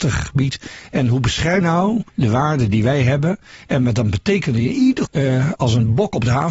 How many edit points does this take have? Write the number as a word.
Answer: three